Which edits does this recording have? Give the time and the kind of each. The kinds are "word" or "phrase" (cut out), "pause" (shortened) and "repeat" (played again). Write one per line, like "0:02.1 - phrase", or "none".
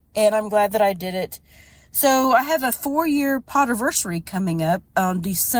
none